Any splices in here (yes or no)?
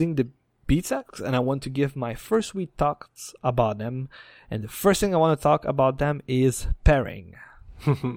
no